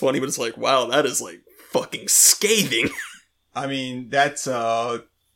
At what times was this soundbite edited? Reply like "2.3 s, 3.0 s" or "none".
none